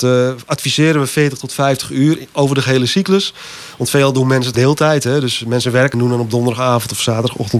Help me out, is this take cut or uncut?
cut